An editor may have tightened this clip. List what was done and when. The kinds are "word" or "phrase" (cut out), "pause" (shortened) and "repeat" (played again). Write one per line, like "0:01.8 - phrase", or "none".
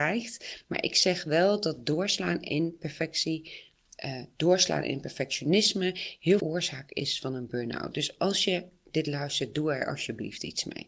0:06.4 - phrase